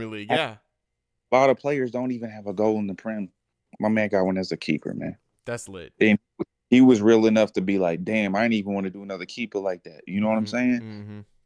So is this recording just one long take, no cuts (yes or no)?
yes